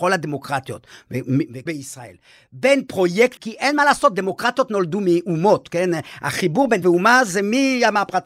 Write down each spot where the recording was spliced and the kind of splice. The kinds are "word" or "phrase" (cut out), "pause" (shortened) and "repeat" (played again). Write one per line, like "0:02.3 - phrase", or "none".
0:01.7 - word
0:03.4 - word
0:06.8 - word